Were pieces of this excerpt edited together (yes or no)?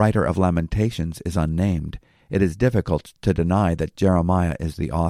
no